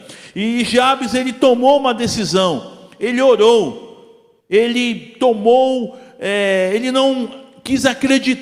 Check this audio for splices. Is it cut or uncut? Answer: cut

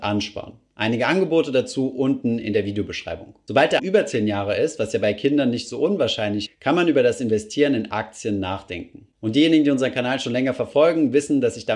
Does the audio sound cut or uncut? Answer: cut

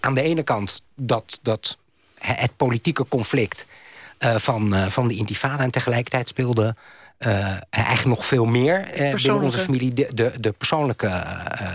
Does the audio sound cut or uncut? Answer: uncut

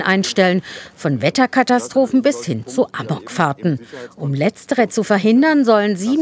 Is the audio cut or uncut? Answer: uncut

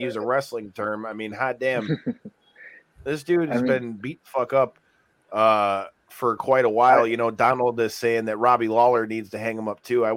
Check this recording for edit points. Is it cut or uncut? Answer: uncut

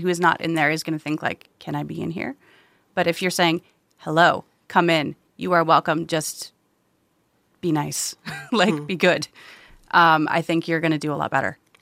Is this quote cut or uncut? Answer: uncut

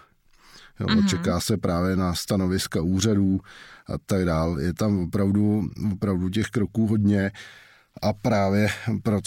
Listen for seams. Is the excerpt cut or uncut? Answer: uncut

